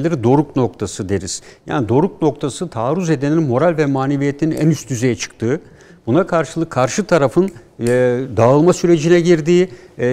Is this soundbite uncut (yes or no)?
yes